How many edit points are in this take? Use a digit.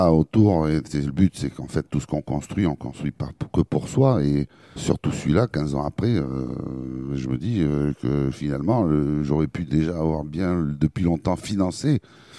1